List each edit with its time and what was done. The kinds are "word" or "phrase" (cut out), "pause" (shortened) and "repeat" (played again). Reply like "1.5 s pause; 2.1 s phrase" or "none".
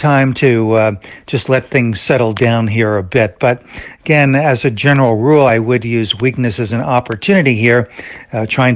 none

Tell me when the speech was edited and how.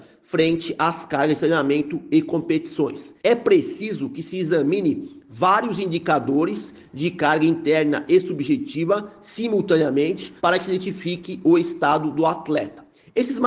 3.2 s pause; 10.4 s pause

